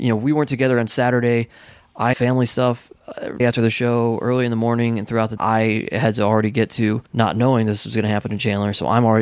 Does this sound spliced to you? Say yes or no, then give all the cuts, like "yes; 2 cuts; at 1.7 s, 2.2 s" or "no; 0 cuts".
yes; 4 cuts; at 2.1 s, 3.4 s, 5.4 s, 7.1 s